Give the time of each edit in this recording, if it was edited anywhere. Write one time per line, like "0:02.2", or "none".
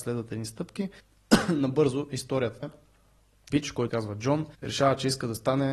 0:01.0
0:02.6
0:03.5
0:03.9
0:04.5